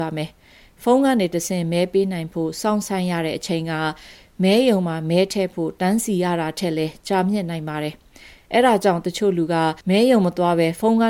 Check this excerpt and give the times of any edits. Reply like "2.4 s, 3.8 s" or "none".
9.8 s